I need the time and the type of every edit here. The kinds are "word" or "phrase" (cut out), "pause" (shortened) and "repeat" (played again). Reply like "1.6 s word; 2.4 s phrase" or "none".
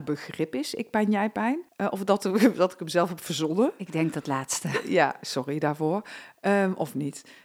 1.7 s pause